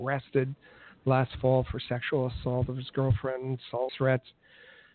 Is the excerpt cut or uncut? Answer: cut